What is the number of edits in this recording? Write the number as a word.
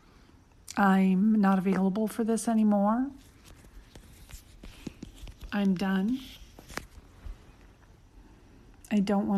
zero